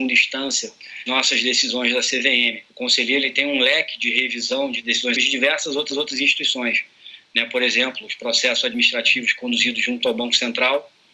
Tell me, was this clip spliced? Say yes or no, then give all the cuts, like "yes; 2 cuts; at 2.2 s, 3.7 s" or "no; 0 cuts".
yes; 4 cuts; at 1.1 s, 2.7 s, 5.2 s, 5.9 s